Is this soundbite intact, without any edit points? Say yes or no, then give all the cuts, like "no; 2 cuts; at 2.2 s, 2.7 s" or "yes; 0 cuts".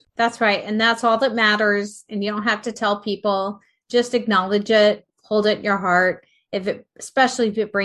yes; 0 cuts